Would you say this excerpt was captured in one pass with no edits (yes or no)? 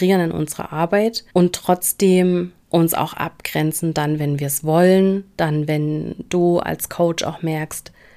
no